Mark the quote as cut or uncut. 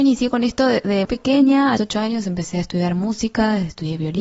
cut